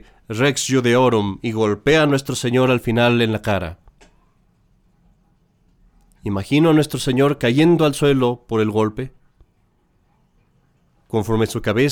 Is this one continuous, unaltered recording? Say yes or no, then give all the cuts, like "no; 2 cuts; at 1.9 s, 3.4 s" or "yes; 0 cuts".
yes; 0 cuts